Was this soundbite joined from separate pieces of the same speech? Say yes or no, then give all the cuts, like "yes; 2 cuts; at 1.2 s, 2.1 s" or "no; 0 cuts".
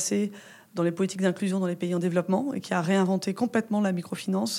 no; 0 cuts